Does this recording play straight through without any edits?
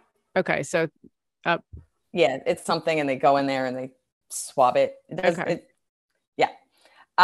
no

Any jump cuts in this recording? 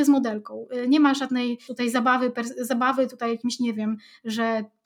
yes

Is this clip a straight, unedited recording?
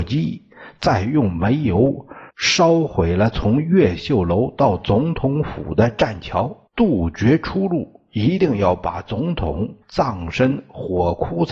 no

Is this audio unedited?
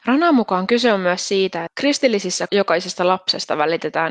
no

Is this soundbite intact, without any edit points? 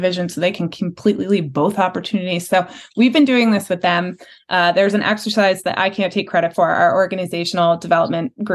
yes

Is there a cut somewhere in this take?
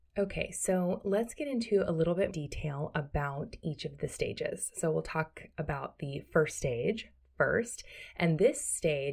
yes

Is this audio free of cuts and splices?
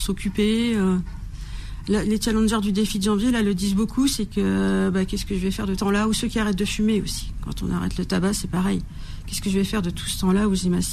no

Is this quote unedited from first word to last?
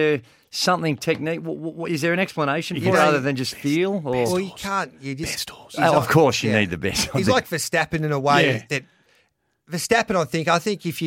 yes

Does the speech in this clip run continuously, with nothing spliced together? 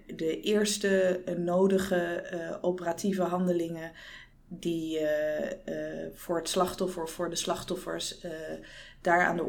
yes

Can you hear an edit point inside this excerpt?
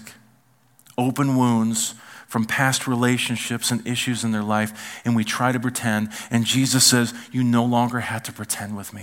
no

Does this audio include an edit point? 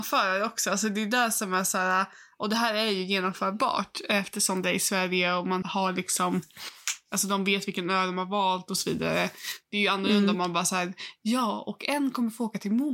yes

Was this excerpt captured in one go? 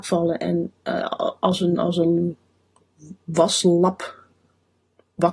yes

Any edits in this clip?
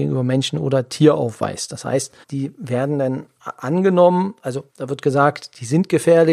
yes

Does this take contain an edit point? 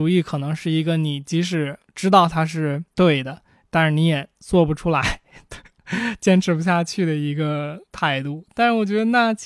no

